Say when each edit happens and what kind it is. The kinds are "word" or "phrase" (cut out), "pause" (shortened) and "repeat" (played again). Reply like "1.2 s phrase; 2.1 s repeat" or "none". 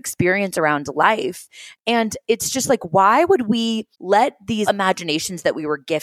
3.9 s pause; 4.7 s phrase